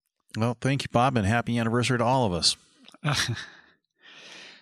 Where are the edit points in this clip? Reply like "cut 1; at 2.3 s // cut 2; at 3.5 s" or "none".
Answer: none